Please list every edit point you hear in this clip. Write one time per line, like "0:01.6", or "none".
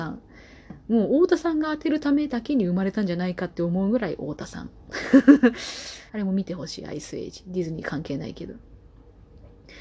0:06.1